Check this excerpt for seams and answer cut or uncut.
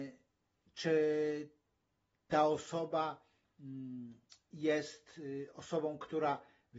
uncut